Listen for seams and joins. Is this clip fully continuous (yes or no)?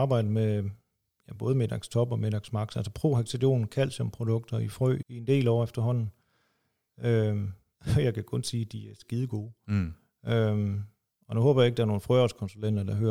no